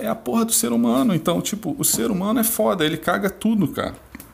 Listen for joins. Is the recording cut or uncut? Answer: uncut